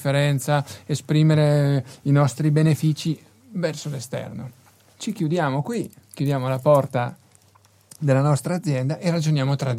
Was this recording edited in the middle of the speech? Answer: no; 0 cuts

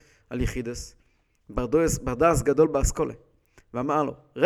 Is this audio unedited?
yes; 0 cuts

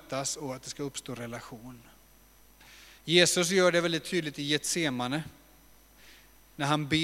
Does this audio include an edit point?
yes; 1 cut; at 3.0 s

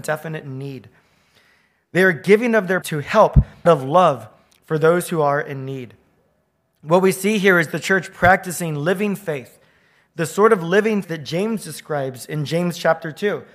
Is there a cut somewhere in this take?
yes; 3 cuts; at 2.8 s, 3.7 s, 11.0 s

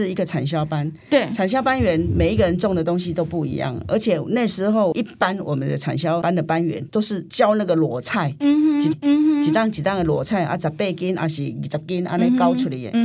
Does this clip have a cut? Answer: yes; 1 cut; at 8.9 s

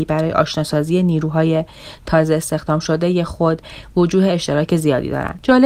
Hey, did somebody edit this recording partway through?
no; 0 cuts

